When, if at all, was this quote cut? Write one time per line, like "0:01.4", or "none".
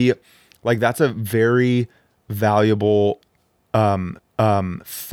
0:04.2